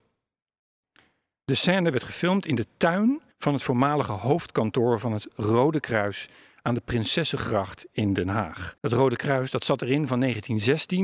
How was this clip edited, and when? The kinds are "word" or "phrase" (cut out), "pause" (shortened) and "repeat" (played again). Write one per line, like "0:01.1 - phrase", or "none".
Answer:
0:03.3 - pause
0:08.8 - pause